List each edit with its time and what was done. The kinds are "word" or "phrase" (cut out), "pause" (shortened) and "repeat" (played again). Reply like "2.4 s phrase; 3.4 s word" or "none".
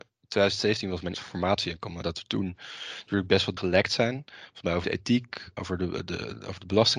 1.1 s word; 2.0 s word; 3.6 s word; 4.8 s word; 5.6 s word